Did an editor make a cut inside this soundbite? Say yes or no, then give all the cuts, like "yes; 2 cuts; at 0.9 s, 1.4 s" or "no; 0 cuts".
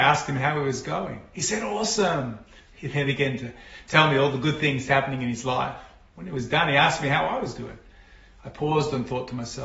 no; 0 cuts